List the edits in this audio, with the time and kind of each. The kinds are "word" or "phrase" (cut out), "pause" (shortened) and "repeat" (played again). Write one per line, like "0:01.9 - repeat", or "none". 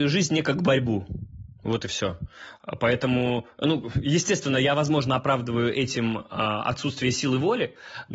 none